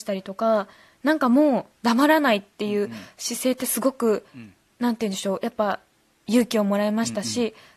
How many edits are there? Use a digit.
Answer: 0